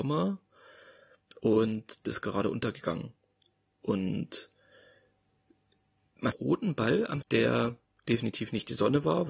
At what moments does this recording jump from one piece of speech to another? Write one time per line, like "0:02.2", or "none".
0:02.1
0:06.3
0:07.2